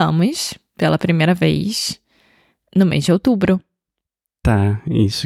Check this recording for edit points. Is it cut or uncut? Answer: uncut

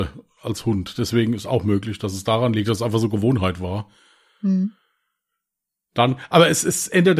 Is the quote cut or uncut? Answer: uncut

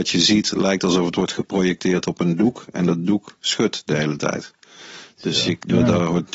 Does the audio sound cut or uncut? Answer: uncut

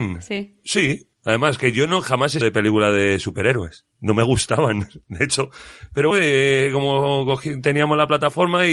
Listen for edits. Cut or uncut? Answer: cut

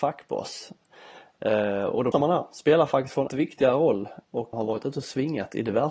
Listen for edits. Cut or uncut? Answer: cut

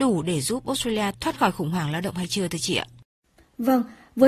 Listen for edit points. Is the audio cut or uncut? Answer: cut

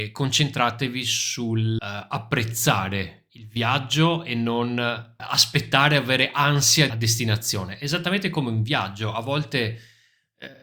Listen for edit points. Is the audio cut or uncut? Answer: cut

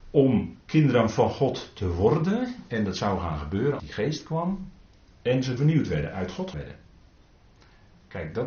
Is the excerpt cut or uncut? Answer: cut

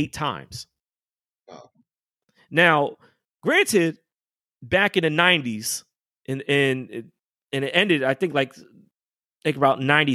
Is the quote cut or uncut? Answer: uncut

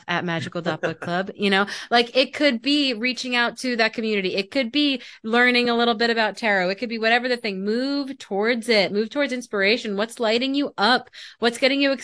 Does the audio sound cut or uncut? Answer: uncut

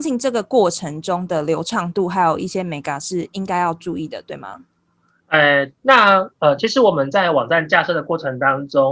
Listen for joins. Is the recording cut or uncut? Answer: cut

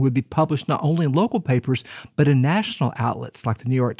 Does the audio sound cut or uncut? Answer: uncut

